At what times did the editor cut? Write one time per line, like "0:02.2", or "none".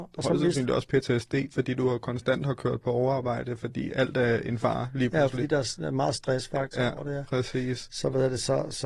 none